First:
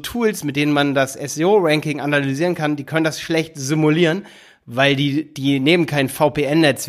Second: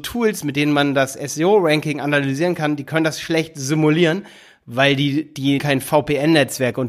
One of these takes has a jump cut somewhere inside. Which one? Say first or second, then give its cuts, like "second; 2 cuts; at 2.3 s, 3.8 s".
second; 1 cut; at 5.6 s